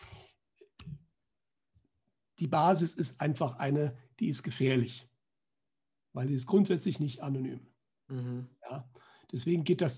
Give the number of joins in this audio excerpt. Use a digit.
0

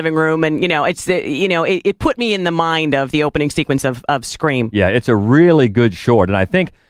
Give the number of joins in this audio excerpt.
0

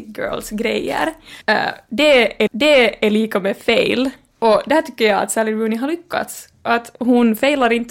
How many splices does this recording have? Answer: 2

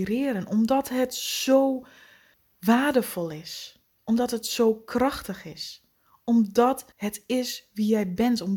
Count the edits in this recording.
2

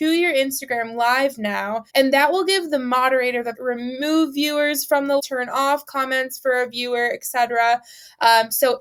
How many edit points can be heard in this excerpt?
3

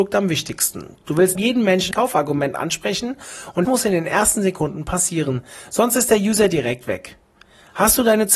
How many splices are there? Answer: 3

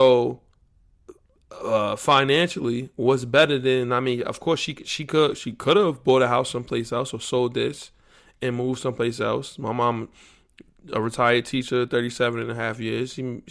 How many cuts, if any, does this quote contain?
0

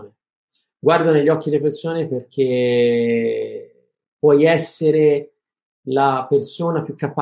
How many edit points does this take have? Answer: 0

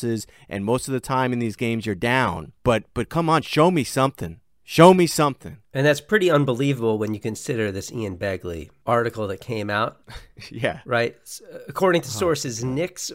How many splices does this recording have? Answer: 3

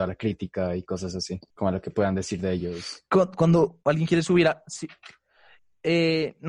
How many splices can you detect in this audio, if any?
1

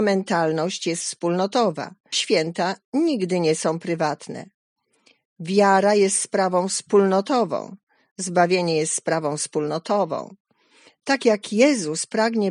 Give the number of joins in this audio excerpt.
1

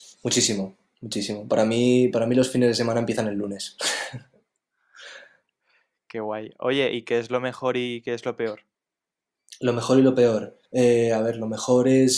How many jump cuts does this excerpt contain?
1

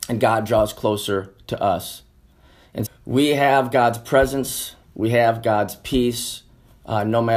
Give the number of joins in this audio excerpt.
2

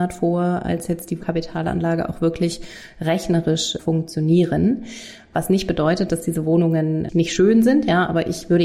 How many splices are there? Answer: 1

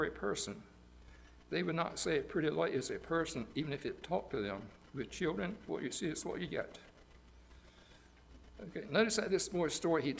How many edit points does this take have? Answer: 0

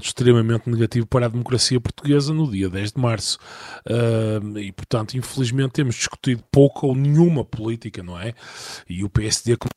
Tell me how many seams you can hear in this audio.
0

